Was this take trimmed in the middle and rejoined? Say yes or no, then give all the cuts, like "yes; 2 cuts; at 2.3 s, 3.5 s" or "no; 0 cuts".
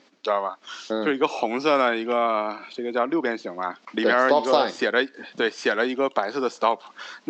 no; 0 cuts